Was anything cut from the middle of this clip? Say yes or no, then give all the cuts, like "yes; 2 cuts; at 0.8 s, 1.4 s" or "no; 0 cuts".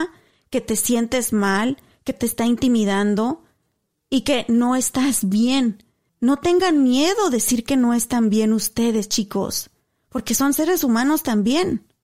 no; 0 cuts